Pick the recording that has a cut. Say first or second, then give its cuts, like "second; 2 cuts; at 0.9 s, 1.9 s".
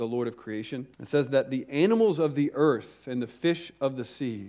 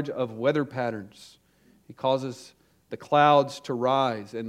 first; 1 cut; at 0.9 s